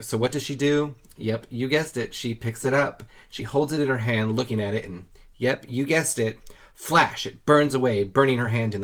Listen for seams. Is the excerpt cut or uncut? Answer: uncut